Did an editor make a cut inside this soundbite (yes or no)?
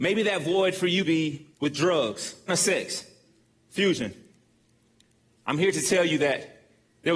yes